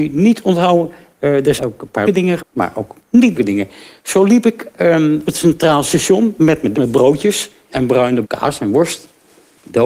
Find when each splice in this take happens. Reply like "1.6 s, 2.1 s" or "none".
1.6 s, 2.1 s, 2.4 s, 3.0 s, 3.4 s, 5.3 s, 6.7 s, 7.7 s, 8.2 s